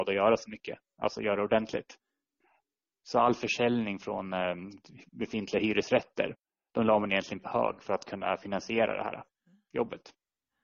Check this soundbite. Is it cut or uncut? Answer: uncut